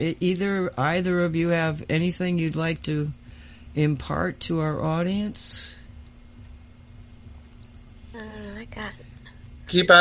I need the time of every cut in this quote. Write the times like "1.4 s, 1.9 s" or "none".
none